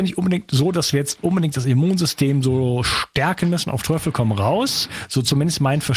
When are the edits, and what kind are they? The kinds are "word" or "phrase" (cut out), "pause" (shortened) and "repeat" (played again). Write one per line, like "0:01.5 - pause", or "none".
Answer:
none